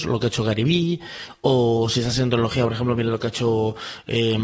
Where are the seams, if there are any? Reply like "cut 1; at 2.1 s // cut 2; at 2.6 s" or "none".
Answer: none